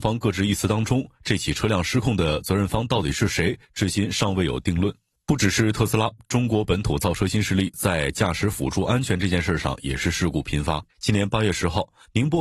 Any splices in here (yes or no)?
yes